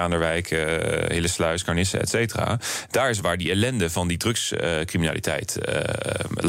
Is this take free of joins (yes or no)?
no